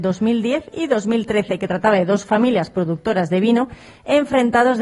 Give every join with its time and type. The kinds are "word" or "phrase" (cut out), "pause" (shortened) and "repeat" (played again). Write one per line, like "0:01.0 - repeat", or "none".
none